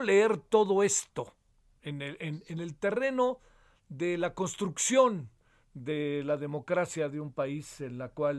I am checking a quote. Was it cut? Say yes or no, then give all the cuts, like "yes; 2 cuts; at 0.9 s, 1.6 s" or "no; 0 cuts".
no; 0 cuts